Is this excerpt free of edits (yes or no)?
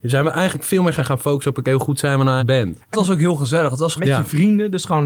no